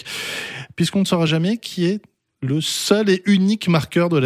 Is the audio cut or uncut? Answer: uncut